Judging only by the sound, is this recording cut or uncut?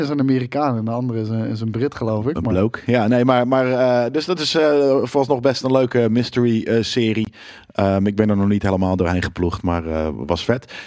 uncut